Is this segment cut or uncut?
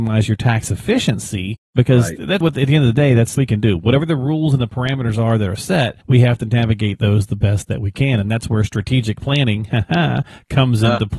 cut